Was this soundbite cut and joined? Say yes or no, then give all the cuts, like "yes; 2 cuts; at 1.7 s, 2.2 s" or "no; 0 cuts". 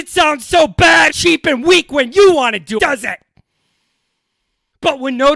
yes; 2 cuts; at 1.1 s, 2.8 s